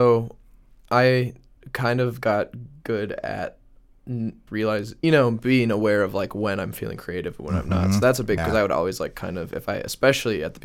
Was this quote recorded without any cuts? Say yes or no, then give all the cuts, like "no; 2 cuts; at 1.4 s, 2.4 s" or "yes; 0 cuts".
no; 4 cuts; at 1.6 s, 4.5 s, 5.0 s, 8.4 s